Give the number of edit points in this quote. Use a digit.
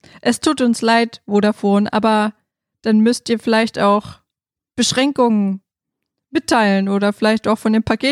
0